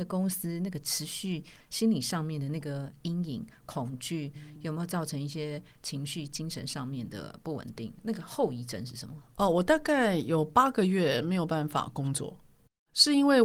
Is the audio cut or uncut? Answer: uncut